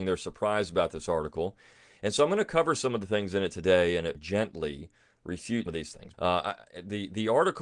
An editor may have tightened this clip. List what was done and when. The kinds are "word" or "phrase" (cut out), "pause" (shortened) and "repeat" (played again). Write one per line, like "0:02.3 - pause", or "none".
0:04.1 - word
0:05.7 - word
0:06.1 - word